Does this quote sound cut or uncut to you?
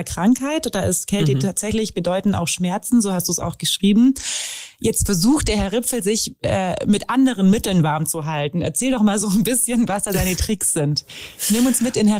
uncut